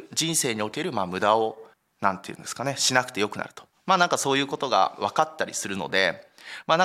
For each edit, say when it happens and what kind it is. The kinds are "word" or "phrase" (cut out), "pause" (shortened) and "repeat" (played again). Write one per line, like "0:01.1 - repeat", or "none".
0:01.7 - pause